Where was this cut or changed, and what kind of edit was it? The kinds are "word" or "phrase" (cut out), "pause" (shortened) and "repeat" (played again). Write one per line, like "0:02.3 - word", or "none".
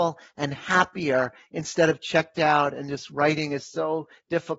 none